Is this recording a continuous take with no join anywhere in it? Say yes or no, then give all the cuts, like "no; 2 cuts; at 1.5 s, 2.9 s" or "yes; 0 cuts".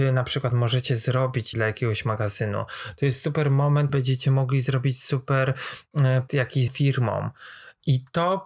no; 4 cuts; at 1.5 s, 3.9 s, 6.3 s, 6.7 s